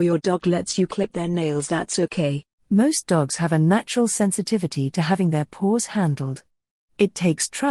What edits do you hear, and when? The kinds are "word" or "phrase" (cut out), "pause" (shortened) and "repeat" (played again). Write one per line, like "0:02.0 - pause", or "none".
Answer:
0:02.6 - pause